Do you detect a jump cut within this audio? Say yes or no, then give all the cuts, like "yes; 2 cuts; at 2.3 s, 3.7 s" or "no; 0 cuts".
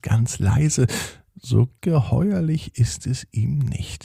yes; 1 cut; at 1.8 s